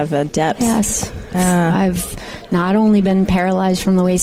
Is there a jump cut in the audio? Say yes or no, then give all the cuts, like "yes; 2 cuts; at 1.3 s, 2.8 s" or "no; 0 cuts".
yes; 1 cut; at 1.3 s